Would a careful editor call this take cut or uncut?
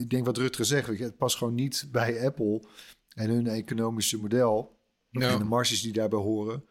uncut